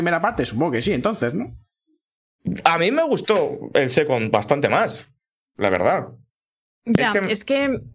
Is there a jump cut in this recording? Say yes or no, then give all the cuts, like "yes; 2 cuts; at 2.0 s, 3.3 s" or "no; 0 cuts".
no; 0 cuts